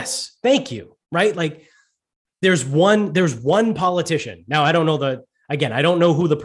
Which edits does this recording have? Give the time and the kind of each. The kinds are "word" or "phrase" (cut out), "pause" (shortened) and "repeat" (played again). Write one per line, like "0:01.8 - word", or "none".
0:01.0 - pause